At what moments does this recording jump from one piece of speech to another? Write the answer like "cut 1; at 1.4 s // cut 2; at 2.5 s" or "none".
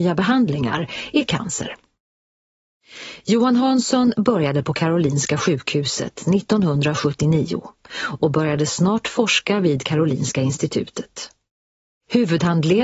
none